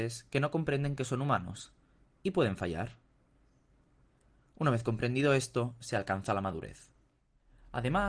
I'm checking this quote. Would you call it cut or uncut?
uncut